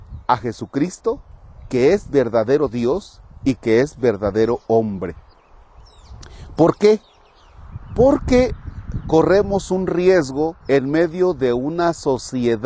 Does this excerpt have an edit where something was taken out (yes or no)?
yes